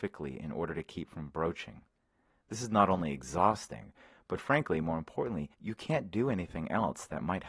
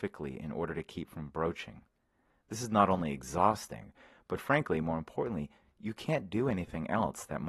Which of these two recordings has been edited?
first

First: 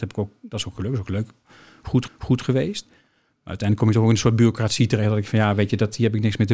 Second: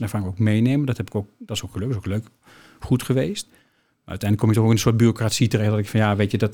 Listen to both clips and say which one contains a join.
first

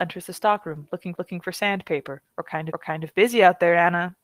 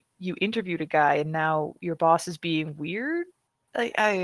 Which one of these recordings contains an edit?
first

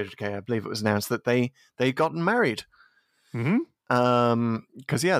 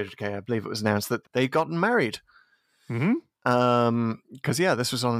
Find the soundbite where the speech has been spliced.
second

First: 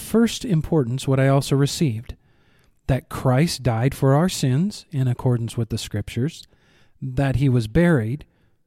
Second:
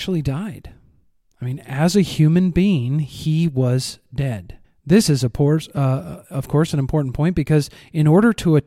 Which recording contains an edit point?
second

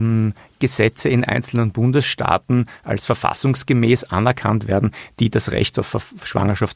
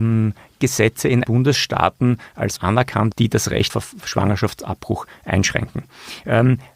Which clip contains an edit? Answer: second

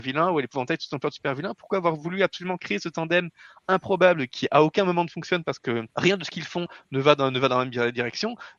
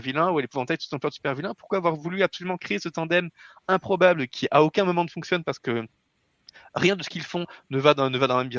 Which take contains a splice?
first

